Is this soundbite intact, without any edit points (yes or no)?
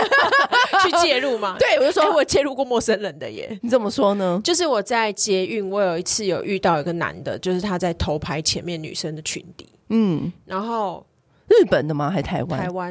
yes